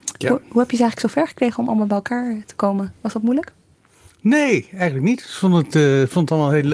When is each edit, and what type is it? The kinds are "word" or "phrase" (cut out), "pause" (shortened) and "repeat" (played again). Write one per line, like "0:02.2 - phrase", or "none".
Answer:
none